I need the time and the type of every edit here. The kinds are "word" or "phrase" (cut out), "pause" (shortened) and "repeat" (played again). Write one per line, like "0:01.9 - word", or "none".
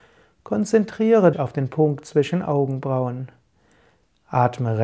0:01.3 - word